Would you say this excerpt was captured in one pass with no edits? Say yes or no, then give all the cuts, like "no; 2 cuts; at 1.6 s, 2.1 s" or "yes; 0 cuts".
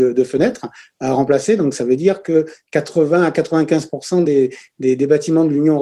yes; 0 cuts